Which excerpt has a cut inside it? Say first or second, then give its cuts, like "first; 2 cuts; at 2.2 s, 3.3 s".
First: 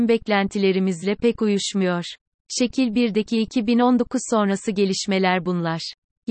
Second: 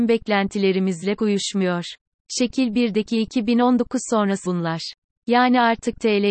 second; 2 cuts; at 1.2 s, 4.4 s